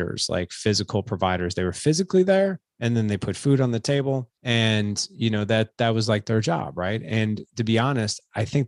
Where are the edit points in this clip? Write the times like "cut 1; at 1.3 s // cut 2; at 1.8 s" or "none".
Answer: cut 1; at 2.7 s // cut 2; at 4.4 s